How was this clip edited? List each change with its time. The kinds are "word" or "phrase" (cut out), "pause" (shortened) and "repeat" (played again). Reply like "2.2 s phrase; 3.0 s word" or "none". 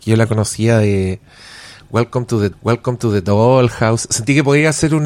2.5 s repeat

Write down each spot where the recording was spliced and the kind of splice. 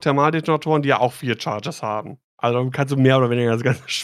2.3 s pause

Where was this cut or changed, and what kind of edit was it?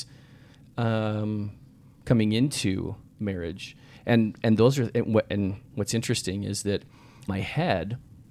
3.1 s pause; 7.3 s phrase

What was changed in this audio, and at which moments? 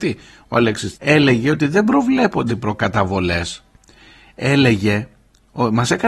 0.9 s word; 2.5 s word

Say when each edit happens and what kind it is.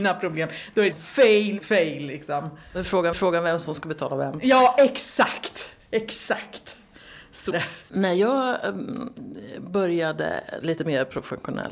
0.9 s word; 1.6 s word; 3.1 s repeat; 7.5 s word; 7.8 s pause; 10.6 s phrase

